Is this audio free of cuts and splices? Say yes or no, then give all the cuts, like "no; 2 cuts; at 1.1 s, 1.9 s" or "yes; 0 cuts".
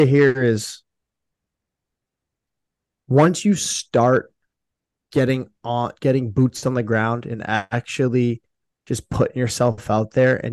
yes; 0 cuts